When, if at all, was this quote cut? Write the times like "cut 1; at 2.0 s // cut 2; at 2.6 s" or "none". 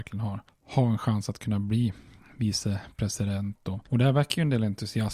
none